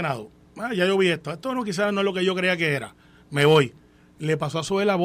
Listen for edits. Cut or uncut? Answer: uncut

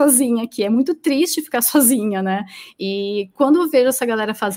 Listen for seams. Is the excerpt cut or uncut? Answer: uncut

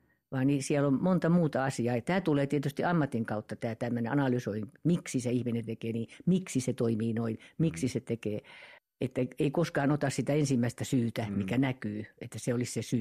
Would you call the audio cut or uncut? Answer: cut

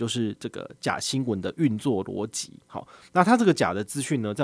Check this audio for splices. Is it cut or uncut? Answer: cut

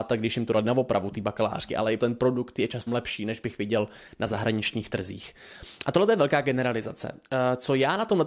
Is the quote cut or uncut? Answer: cut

